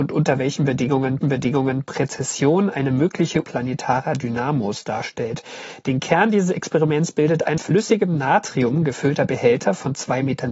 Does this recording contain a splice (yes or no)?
yes